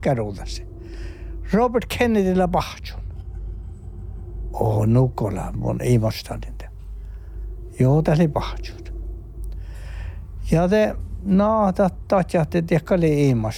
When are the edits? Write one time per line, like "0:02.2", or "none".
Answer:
none